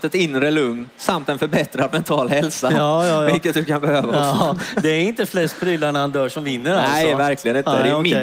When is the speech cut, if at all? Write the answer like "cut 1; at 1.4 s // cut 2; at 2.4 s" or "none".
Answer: none